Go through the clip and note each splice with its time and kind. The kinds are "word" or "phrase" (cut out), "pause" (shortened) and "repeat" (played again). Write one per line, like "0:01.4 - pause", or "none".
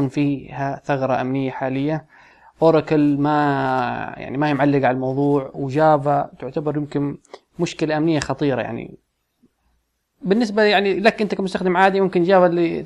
none

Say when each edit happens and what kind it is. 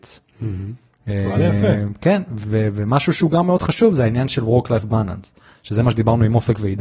none

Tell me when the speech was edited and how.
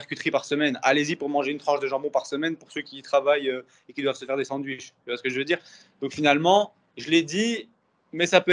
none

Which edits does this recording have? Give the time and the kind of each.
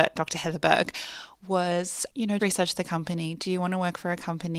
0:02.4 - word

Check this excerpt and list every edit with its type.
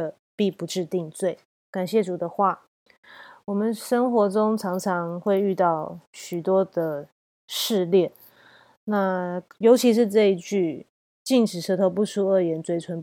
0:01.5 - pause

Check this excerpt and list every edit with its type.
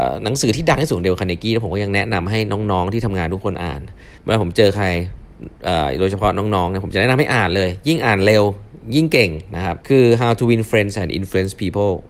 0:04.2 - pause
0:09.8 - pause

